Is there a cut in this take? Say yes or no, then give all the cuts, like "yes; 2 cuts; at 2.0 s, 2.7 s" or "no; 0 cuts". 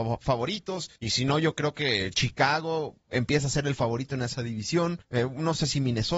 yes; 3 cuts; at 1.0 s, 3.0 s, 5.0 s